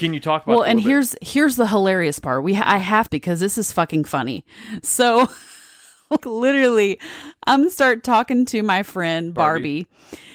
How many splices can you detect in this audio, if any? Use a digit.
2